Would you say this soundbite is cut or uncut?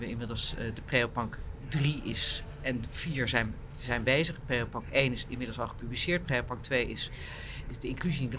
uncut